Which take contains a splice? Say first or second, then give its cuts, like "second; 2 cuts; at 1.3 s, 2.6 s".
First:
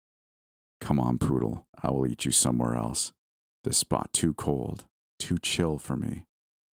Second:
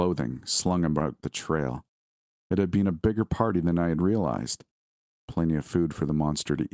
first; 1 cut; at 1.7 s